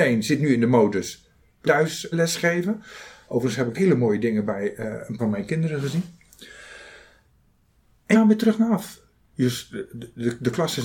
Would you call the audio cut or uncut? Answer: cut